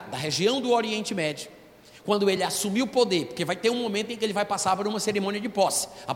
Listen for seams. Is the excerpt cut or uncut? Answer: uncut